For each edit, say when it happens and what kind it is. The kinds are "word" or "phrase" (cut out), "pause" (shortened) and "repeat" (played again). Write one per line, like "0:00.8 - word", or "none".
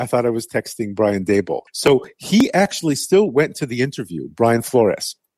0:01.7 - pause